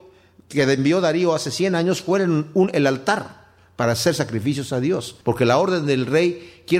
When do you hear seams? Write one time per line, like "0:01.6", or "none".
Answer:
0:05.2